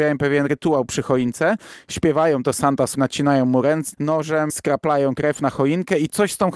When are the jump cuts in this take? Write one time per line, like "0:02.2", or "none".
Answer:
0:02.9
0:03.9
0:04.5